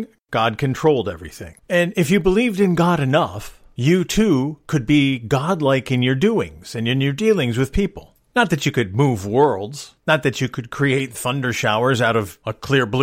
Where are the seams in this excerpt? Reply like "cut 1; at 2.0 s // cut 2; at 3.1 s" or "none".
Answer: cut 1; at 1.6 s